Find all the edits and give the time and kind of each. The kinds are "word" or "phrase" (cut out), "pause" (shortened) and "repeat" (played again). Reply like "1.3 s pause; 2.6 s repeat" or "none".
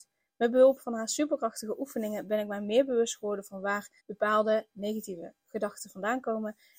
4.0 s pause